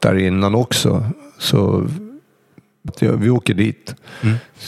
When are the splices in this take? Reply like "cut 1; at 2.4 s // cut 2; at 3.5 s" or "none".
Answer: cut 1; at 2.9 s